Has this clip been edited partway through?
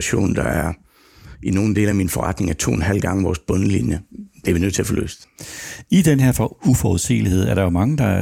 no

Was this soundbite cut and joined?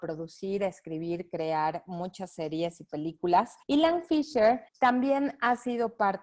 yes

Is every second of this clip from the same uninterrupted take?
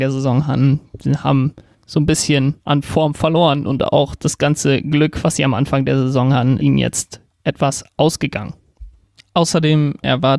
no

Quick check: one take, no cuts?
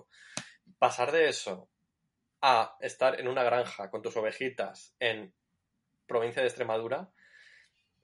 no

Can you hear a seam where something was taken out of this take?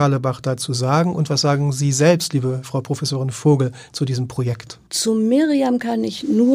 yes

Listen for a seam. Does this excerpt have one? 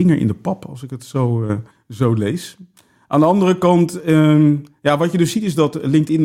yes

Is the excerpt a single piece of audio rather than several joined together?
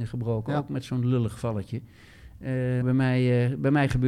no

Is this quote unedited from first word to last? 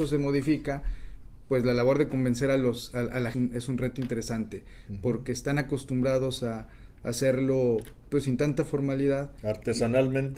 no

